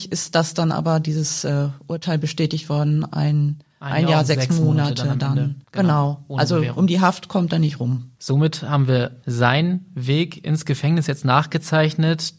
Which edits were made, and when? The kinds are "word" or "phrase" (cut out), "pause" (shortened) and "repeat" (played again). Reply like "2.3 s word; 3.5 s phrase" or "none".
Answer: 5.6 s pause; 8.2 s pause